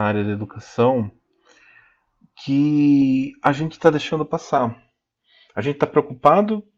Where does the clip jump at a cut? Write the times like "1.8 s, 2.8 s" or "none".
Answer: none